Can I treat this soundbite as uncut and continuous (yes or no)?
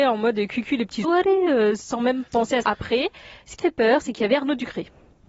no